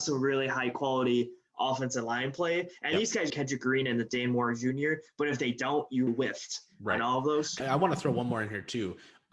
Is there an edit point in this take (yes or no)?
yes